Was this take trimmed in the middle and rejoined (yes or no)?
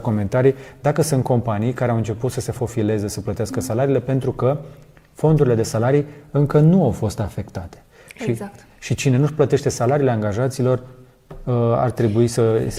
no